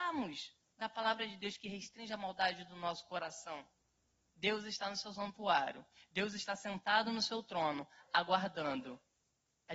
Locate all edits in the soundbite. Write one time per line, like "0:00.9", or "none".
none